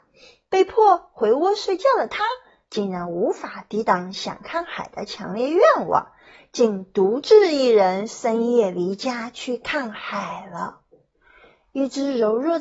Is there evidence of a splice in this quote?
no; 0 cuts

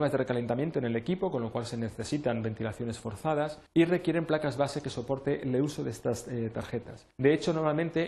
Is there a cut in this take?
yes; 2 cuts; at 3.7 s, 7.1 s

